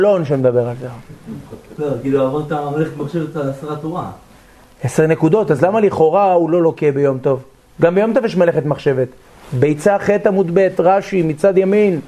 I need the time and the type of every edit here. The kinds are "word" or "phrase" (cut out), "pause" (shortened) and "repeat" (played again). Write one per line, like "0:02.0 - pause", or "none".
none